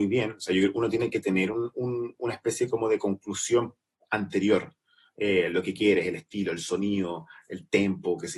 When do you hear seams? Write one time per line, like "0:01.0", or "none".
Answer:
none

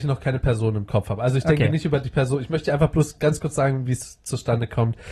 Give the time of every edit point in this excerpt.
none

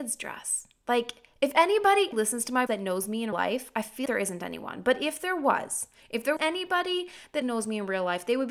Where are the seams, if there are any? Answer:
0:02.1
0:02.7
0:03.3
0:04.1
0:06.4
0:07.4

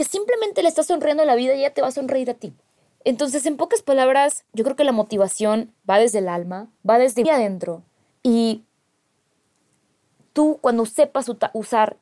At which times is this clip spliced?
0:02.8
0:04.5
0:05.8
0:06.8
0:07.2
0:08.1

